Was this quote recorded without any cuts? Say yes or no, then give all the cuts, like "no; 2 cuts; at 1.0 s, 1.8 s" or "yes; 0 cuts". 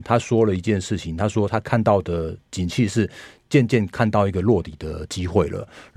yes; 0 cuts